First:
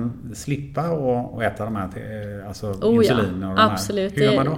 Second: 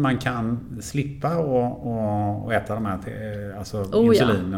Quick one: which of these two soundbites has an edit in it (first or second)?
first